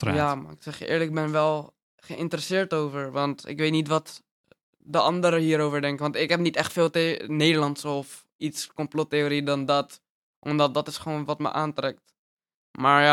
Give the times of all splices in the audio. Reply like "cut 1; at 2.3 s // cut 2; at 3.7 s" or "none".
none